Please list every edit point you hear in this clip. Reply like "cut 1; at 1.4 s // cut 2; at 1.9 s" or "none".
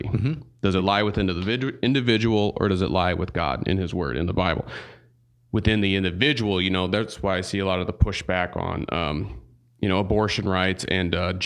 none